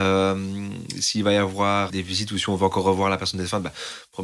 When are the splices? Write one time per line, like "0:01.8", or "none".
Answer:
0:01.9